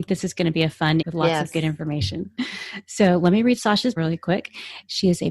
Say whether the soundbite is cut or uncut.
cut